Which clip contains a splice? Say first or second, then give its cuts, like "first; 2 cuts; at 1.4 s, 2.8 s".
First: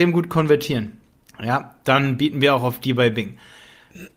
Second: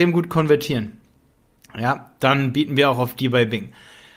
first; 1 cut; at 1.2 s